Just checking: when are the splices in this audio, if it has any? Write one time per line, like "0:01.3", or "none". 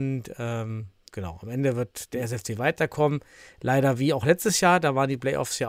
none